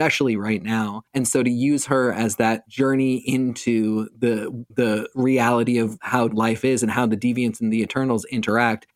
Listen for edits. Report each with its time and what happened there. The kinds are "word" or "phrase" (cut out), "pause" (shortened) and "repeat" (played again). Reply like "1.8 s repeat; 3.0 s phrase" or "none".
6.3 s word